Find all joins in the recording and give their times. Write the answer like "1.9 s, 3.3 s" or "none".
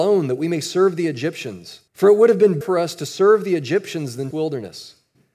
1.9 s, 2.6 s, 4.3 s